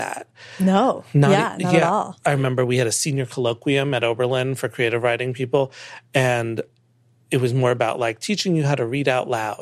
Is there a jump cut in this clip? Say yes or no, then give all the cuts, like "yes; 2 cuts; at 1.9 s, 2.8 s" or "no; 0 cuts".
no; 0 cuts